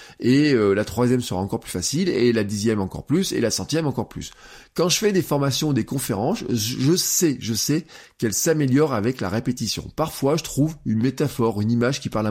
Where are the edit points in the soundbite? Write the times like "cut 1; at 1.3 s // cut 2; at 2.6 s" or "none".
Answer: none